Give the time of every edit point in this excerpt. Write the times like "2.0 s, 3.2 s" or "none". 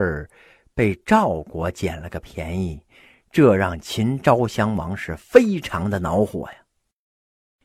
none